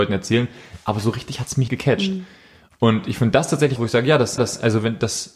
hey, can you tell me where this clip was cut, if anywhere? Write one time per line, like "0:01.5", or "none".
0:01.7
0:03.8
0:04.4